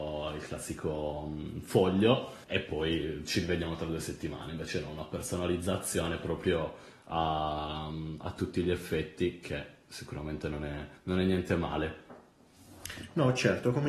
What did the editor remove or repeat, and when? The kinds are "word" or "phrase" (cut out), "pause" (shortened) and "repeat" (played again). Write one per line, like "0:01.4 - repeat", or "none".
0:02.4 - pause
0:11.0 - pause

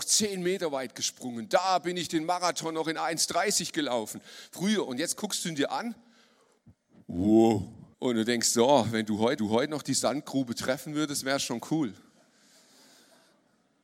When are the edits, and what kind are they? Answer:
0:07.9 - pause
0:09.4 - repeat

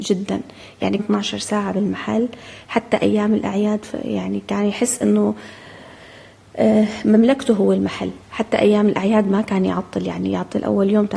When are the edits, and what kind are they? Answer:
0:01.0 - phrase
0:08.2 - pause

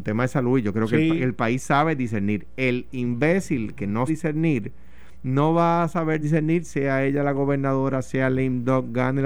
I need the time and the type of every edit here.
0:04.1 - word
0:06.2 - word

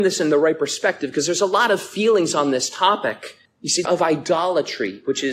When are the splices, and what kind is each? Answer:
0:03.5 - pause
0:03.8 - phrase

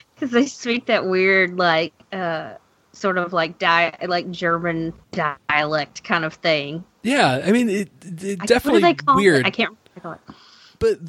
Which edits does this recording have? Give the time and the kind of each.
0:02.0 - pause
0:05.0 - pause

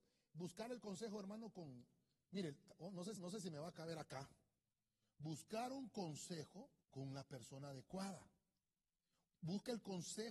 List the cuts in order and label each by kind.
0:03.2 - repeat
0:06.8 - pause

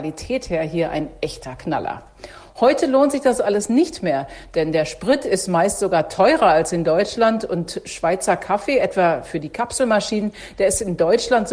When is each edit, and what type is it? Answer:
none

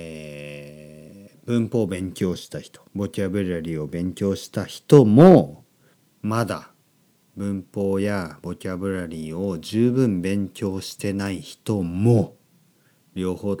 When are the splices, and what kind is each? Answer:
0:02.9 - pause
0:05.9 - pause

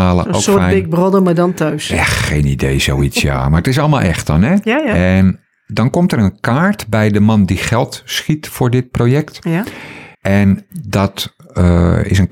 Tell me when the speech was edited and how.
0:10.1 - pause

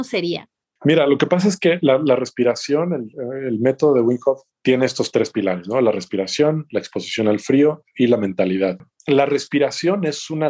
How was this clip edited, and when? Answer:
none

